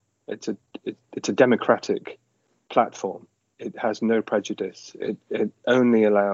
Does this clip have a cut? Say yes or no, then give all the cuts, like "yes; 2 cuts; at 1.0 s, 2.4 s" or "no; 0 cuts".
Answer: no; 0 cuts